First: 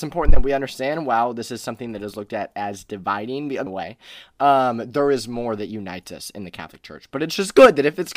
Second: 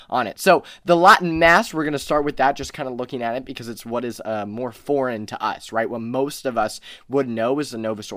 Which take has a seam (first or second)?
first